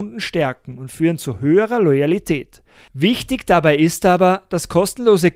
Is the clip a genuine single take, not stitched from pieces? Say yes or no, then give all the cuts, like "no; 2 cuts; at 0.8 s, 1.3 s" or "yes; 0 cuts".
yes; 0 cuts